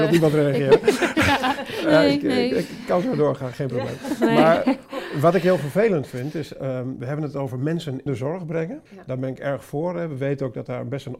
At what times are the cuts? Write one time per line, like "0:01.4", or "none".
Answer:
0:08.1
0:08.9

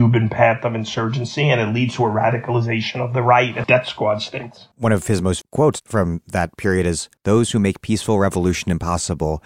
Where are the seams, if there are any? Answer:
0:03.6
0:04.7
0:05.4
0:07.2

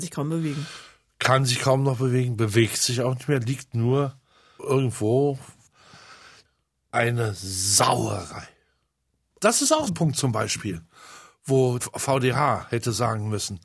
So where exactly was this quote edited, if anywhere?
0:09.9
0:11.8

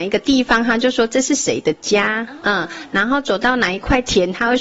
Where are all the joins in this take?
none

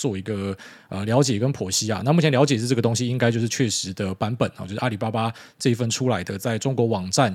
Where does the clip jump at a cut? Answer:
none

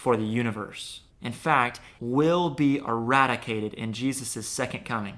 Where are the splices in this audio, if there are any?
0:01.1
0:02.0

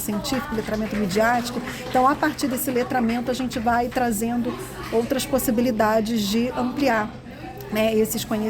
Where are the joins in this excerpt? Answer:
none

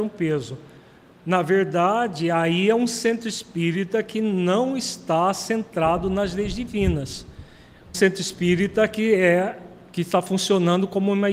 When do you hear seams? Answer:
0:07.9

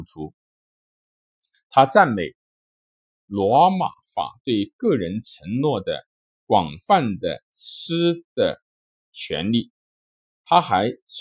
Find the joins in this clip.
none

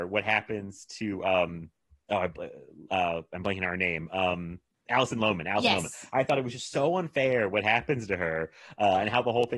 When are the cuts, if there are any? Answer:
none

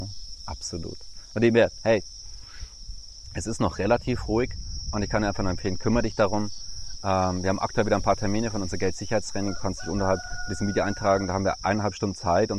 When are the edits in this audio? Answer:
none

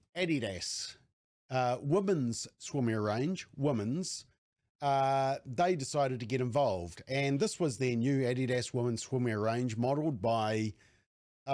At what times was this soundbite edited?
none

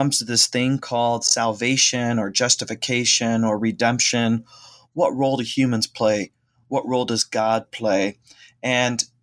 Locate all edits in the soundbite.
none

